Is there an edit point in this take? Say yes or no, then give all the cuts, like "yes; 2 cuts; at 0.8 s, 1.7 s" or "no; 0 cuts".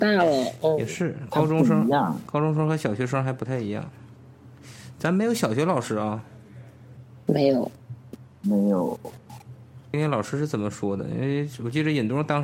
no; 0 cuts